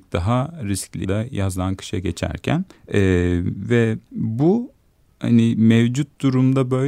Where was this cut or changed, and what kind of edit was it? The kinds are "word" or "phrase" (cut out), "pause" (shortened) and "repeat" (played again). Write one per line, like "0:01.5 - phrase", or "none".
0:01.0 - word
0:02.7 - pause
0:04.0 - pause